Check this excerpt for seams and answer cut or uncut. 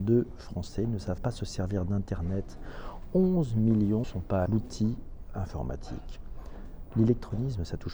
cut